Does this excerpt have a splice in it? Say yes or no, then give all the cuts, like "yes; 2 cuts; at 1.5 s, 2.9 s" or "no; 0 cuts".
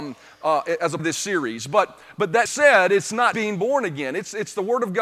yes; 3 cuts; at 1.0 s, 2.5 s, 3.3 s